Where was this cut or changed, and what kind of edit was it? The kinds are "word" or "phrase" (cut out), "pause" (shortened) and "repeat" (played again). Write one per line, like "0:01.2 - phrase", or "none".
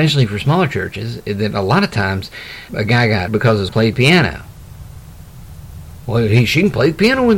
0:02.7 - word
0:03.3 - word
0:03.7 - word